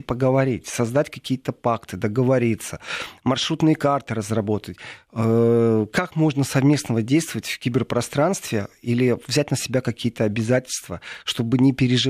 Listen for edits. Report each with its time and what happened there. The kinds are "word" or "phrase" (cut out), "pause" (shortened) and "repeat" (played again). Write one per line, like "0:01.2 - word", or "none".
none